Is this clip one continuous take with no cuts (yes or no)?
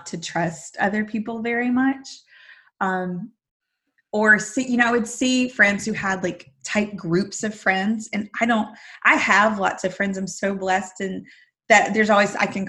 yes